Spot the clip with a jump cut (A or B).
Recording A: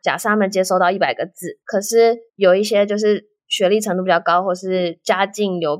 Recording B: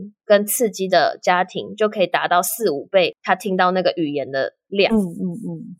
A